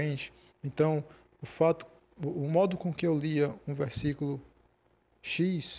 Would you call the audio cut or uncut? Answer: uncut